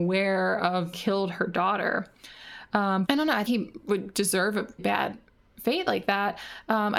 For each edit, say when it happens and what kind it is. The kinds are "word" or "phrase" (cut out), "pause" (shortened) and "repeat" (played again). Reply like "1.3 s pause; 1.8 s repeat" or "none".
0.9 s word; 3.0 s word; 3.5 s word; 4.8 s word